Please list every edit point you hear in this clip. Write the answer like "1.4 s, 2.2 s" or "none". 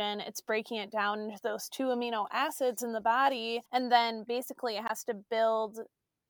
3.7 s